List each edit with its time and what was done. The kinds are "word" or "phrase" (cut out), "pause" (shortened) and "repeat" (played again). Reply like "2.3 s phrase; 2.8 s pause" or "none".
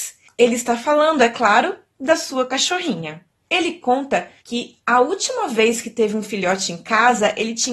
4.4 s pause